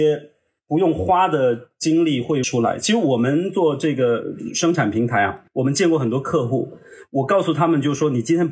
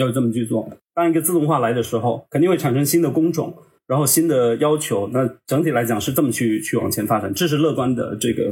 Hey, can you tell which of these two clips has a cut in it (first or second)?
first